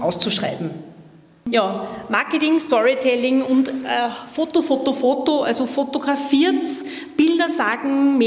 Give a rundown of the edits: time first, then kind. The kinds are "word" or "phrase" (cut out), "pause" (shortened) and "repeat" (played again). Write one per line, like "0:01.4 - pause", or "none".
none